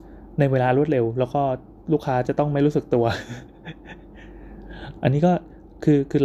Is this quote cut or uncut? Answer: uncut